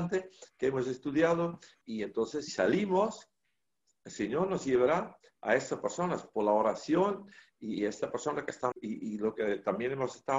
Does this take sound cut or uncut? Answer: cut